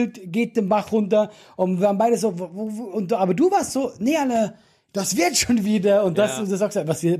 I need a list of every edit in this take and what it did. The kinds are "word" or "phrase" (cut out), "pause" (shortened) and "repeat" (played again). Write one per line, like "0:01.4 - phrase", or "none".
none